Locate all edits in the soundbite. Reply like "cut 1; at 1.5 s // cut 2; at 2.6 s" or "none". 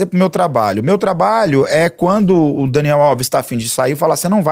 none